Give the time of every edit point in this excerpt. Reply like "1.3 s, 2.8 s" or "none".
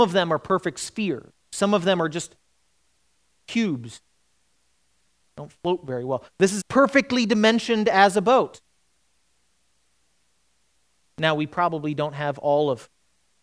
6.6 s